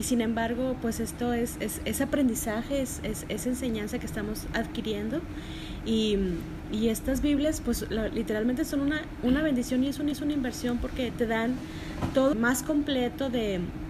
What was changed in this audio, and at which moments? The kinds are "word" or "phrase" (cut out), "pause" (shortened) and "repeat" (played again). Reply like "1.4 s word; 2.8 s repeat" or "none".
10.1 s repeat; 12.3 s phrase